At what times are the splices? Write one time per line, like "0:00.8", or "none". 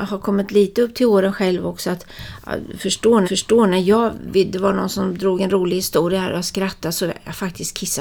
0:03.2